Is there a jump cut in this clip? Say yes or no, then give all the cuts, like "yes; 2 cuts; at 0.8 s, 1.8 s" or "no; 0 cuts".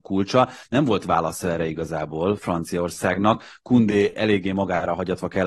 no; 0 cuts